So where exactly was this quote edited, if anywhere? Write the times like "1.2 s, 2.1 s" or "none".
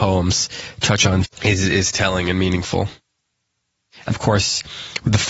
1.2 s, 4.1 s